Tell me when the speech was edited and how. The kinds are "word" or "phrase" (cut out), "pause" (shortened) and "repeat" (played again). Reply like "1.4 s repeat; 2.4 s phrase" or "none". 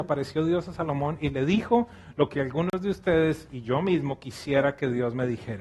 none